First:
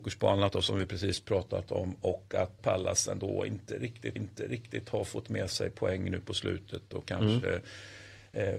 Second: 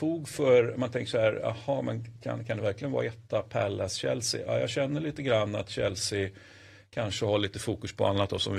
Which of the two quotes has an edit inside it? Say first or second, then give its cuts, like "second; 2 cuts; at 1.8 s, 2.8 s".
first; 2 cuts; at 2.6 s, 4.2 s